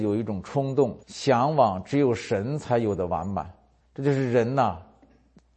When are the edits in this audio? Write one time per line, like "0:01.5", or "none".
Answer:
0:01.0
0:03.8